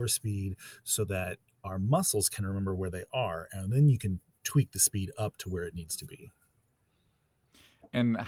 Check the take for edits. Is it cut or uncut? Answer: uncut